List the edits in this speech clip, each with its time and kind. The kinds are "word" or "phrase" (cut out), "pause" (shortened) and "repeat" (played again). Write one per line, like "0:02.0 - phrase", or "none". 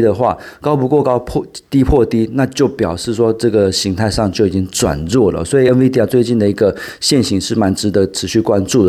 none